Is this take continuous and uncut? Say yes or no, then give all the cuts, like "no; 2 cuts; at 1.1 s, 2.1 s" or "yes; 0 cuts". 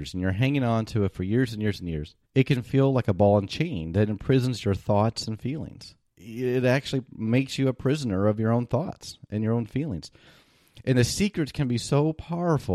no; 2 cuts; at 2.2 s, 6.1 s